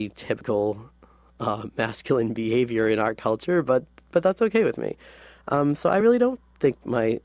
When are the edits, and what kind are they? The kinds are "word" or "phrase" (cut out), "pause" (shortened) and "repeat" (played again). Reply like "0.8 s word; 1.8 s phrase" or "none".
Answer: none